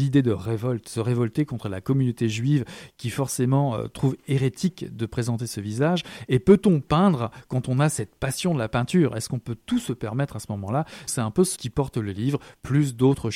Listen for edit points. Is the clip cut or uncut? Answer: cut